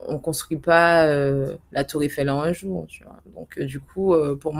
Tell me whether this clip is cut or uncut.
cut